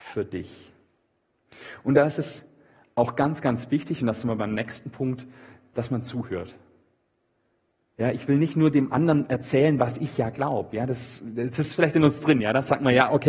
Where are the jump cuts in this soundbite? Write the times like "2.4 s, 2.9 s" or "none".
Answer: none